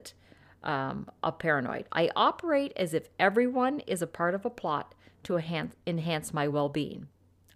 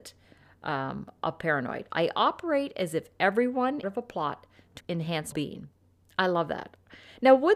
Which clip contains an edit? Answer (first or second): second